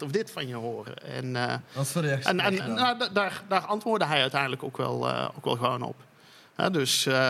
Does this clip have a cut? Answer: no; 0 cuts

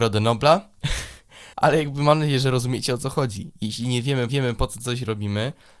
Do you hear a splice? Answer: yes; 2 cuts; at 1.5 s, 4.3 s

